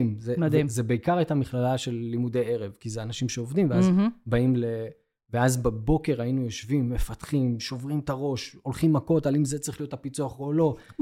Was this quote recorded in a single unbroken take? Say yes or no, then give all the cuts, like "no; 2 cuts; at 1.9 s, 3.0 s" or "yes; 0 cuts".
yes; 0 cuts